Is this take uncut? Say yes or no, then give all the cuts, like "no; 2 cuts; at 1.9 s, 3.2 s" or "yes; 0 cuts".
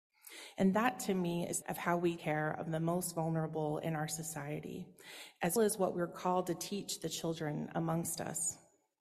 no; 3 cuts; at 1.6 s, 2.2 s, 5.6 s